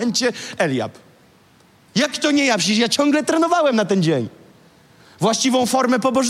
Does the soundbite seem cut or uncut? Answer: uncut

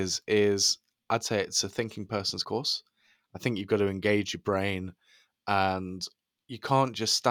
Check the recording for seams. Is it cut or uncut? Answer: cut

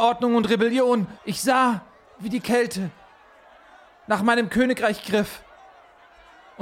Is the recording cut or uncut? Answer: cut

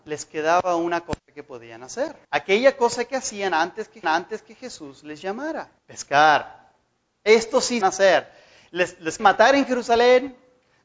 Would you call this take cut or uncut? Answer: cut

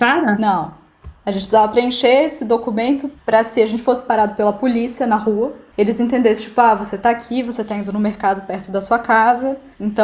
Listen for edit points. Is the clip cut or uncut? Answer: uncut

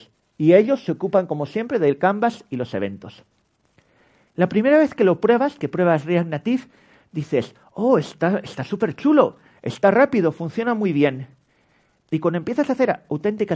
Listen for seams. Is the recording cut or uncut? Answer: uncut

